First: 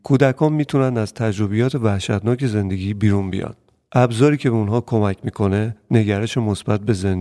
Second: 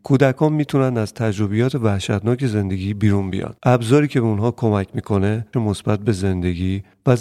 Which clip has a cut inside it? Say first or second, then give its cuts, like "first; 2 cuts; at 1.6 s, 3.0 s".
second; 2 cuts; at 3.6 s, 5.5 s